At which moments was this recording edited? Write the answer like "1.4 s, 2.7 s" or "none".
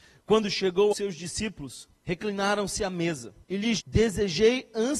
0.9 s, 2.0 s, 3.4 s, 3.8 s